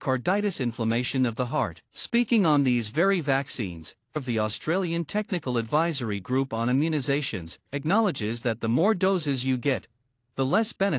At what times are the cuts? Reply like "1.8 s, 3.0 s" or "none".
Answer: 1.9 s, 4.2 s, 7.7 s